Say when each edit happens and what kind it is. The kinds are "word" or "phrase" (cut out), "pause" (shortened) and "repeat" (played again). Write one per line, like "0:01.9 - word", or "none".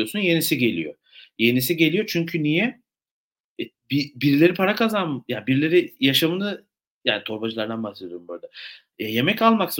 none